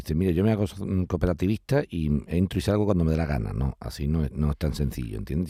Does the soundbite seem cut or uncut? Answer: uncut